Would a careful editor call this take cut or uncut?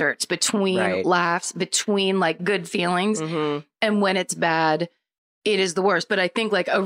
uncut